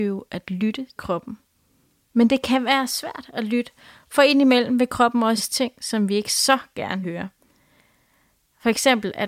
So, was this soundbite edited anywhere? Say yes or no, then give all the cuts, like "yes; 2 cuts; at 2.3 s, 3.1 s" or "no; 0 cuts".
yes; 3 cuts; at 1.0 s, 5.4 s, 7.0 s